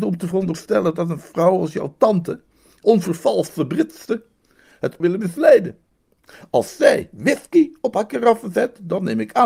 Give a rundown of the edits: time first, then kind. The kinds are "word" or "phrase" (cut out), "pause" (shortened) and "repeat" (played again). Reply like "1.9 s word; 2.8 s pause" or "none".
2.8 s word; 5.0 s phrase

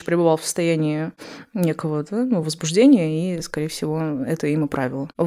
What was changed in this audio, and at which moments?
none

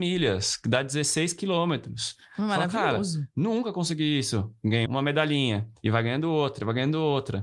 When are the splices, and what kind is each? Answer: 4.9 s word

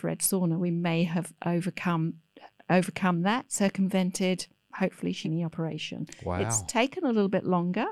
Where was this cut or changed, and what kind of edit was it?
4.6 s pause; 5.2 s phrase

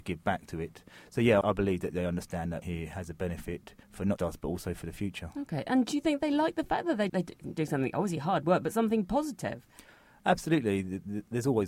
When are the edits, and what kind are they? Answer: 1.4 s word; 1.9 s word; 2.6 s phrase; 3.8 s pause; 4.2 s word; 7.1 s word

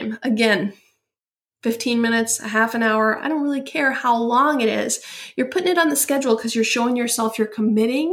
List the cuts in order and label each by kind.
none

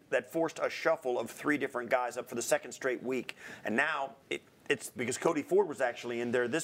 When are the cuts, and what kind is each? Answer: 2.3 s word; 4.2 s pause; 5.0 s phrase

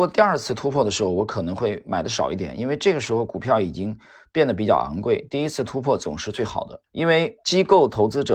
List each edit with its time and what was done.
6.9 s pause; 7.4 s pause

